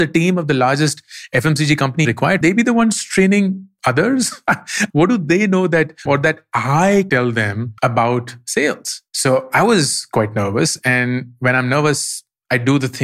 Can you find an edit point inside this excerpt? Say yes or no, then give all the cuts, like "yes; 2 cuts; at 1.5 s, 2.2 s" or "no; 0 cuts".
yes; 7 cuts; at 2.0 s, 2.4 s, 4.9 s, 6.1 s, 7.1 s, 7.8 s, 9.1 s